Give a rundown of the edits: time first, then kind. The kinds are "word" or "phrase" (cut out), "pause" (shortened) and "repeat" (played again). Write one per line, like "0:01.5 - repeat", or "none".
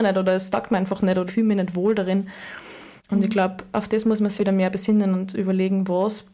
0:01.3 - word
0:03.0 - pause
0:04.4 - word